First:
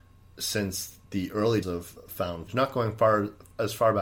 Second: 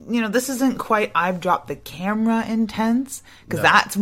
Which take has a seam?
first; 3 cuts; at 1.0 s, 1.6 s, 2.5 s

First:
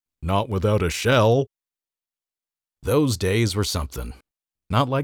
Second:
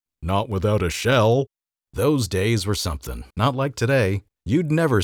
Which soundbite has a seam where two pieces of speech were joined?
second; 2 cuts; at 1.6 s, 3.3 s

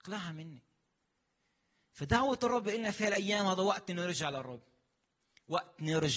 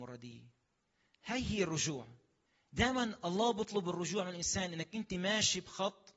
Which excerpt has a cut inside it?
second; 1 cut; at 2.5 s

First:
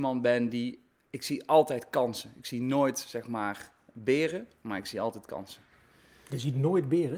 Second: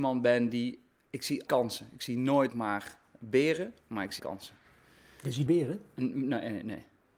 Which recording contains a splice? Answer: second; 4 cuts; at 1.5 s, 2.5 s, 4.2 s, 5.5 s

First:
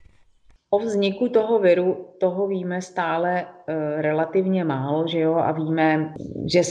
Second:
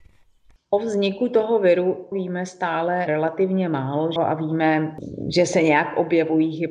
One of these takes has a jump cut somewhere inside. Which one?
second; 3 cuts; at 2.1 s, 3.1 s, 4.2 s

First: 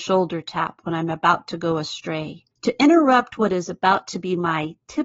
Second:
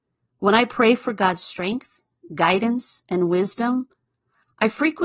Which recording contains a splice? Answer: first; 1 cut; at 2.5 s

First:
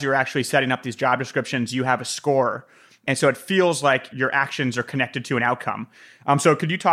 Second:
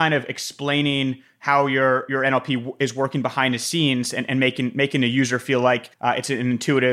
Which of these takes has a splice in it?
second; 1 cut; at 5.9 s

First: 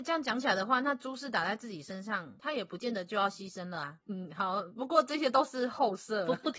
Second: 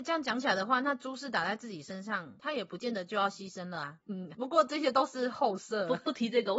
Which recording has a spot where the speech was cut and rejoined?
second; 1 cut; at 4.3 s

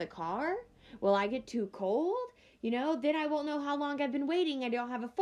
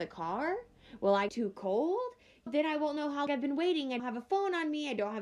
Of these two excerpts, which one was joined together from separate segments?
second; 4 cuts; at 1.3 s, 2.5 s, 3.3 s, 4.0 s

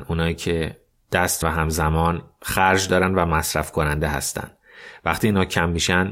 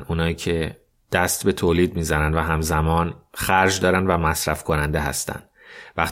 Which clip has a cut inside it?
first; 1 cut; at 1.4 s

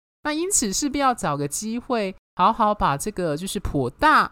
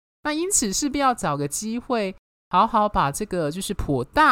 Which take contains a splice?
first; 1 cut; at 2.2 s

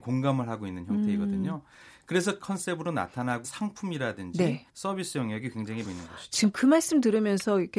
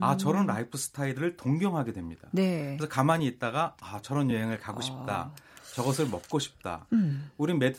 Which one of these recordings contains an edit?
first; 4 cuts; at 2.4 s, 3.4 s, 4.7 s, 5.8 s

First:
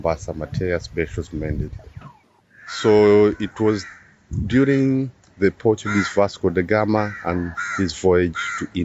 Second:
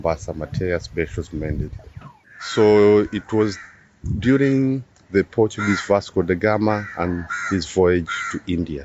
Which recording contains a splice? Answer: second; 1 cut; at 2.2 s

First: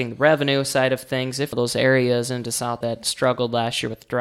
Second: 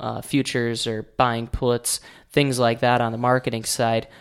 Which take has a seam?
first; 2 cuts; at 1.5 s, 2.8 s

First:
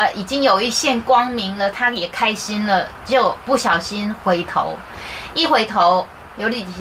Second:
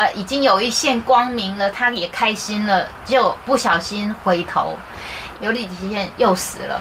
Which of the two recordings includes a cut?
second; 1 cut; at 5.3 s

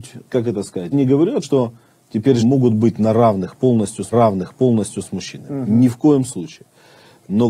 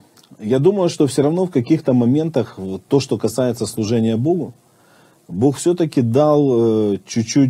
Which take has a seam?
first; 4 cuts; at 0.9 s, 1.4 s, 2.4 s, 4.1 s

